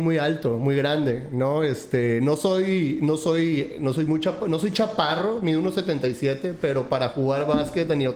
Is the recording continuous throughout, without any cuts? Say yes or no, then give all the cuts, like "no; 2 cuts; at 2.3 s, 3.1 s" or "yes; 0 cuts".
yes; 0 cuts